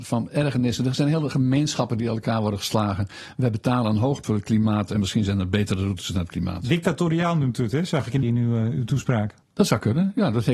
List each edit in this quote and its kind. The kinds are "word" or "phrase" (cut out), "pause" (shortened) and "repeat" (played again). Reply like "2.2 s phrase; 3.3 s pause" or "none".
4.2 s word; 8.2 s phrase; 9.4 s pause